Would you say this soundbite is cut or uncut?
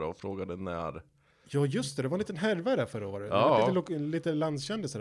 uncut